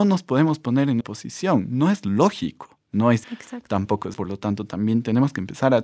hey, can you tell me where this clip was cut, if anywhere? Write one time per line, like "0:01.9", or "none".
0:01.0
0:03.2
0:04.1